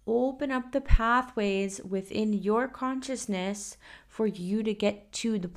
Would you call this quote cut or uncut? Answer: uncut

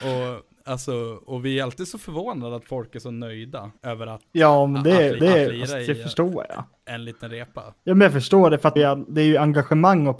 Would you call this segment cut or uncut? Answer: cut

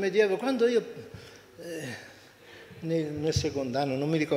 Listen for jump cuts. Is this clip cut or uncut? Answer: uncut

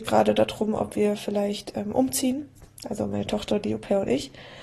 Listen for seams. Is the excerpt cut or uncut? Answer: uncut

